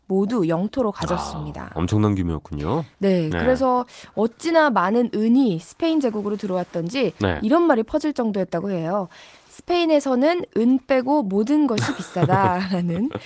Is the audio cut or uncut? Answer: uncut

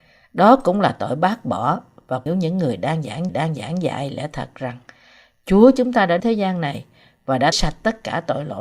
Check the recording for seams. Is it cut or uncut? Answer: cut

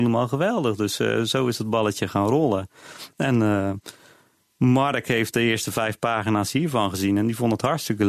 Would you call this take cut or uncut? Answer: uncut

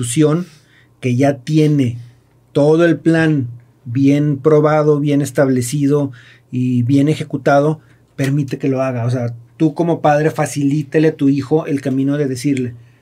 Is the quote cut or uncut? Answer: uncut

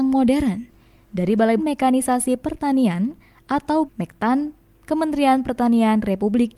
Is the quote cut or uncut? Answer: cut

